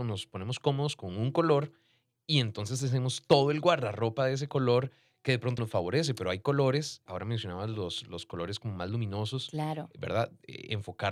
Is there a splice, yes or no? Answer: yes